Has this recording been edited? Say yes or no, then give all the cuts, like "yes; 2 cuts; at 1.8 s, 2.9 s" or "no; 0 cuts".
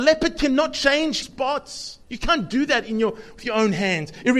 yes; 2 cuts; at 1.2 s, 2.0 s